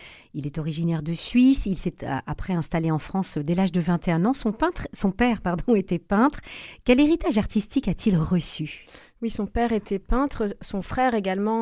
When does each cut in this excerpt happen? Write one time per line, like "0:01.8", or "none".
none